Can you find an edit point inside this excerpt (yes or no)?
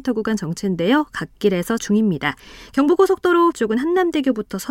yes